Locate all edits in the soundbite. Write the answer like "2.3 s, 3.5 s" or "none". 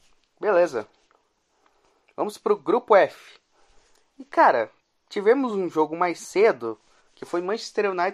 none